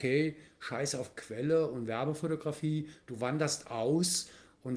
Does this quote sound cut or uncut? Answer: uncut